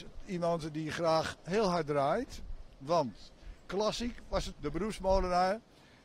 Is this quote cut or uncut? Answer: cut